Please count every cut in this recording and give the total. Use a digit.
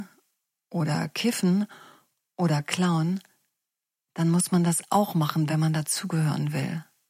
0